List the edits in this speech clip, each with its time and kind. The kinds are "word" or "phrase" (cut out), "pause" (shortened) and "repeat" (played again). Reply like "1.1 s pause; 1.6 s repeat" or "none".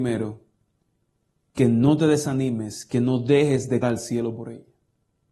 3.8 s word